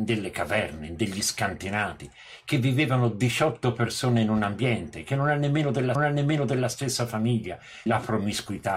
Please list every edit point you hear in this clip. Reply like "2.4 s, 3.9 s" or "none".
5.9 s, 7.9 s